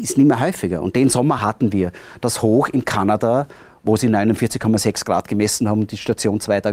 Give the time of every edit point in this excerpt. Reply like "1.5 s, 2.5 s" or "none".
none